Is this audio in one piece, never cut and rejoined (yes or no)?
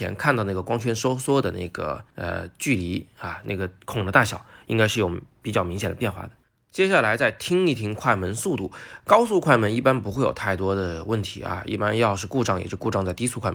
no